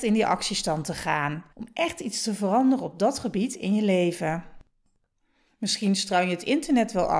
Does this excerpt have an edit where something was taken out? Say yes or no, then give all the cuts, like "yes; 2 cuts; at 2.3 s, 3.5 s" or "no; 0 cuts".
yes; 1 cut; at 1.5 s